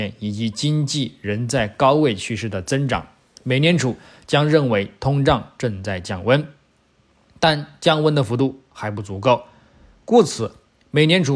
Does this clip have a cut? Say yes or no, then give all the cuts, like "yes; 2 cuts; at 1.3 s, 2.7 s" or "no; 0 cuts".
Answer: no; 0 cuts